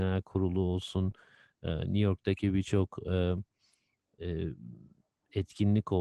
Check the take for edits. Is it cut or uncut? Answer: uncut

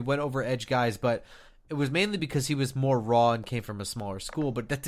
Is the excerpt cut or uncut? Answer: uncut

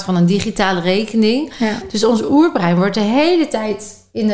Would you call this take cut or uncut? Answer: uncut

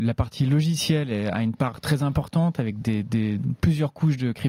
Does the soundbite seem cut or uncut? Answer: uncut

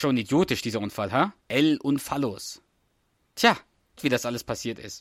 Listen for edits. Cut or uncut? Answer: cut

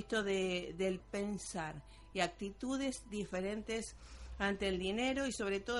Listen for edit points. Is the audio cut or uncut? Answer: cut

